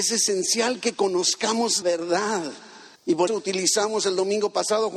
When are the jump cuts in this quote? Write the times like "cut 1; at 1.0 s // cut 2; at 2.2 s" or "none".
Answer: cut 1; at 1.8 s // cut 2; at 3.0 s // cut 3; at 3.3 s